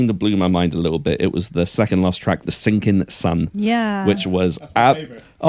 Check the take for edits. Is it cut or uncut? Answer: uncut